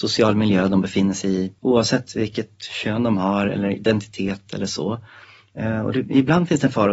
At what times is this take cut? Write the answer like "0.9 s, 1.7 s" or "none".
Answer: 1.6 s